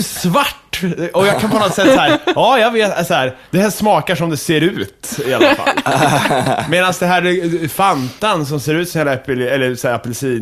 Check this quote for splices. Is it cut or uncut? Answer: cut